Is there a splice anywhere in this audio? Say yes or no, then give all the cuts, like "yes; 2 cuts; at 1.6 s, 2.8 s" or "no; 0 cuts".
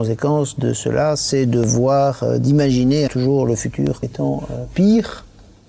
yes; 2 cuts; at 3.1 s, 4.0 s